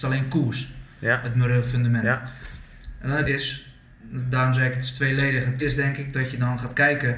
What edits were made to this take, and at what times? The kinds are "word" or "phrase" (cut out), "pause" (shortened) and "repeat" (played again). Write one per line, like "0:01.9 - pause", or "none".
0:03.2 - word
0:05.6 - word